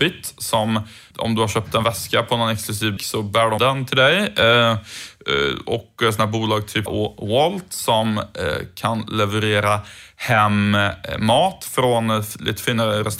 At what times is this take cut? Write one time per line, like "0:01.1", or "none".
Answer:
0:01.1
0:03.0
0:03.6
0:06.9